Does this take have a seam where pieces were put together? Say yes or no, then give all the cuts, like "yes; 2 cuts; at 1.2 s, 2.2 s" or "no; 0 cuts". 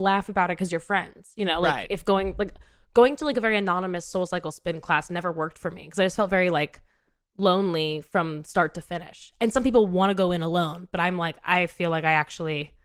no; 0 cuts